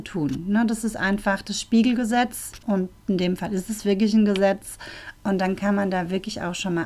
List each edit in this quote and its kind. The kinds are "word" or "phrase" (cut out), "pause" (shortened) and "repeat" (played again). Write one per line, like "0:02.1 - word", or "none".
none